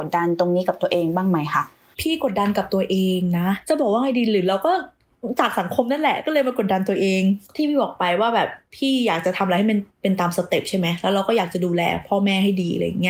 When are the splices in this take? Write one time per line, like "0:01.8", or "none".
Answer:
none